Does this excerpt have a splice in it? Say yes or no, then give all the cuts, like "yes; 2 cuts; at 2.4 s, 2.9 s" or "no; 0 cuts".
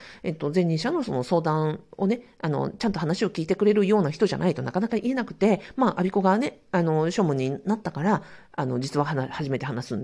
no; 0 cuts